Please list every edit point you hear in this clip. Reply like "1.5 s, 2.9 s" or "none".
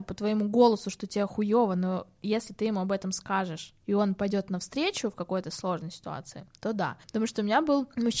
7.0 s